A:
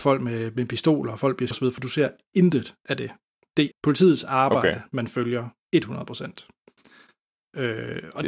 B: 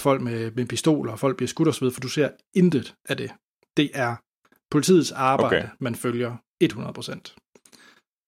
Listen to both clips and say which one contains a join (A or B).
A